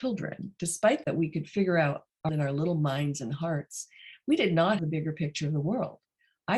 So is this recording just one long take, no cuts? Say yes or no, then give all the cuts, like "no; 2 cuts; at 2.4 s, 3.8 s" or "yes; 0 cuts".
no; 3 cuts; at 1.0 s, 2.3 s, 4.8 s